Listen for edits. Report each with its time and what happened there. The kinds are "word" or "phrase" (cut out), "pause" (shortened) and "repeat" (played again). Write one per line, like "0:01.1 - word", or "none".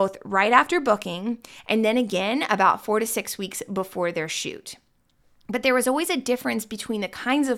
none